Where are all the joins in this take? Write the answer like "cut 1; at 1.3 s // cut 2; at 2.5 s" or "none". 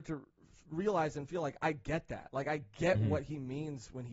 none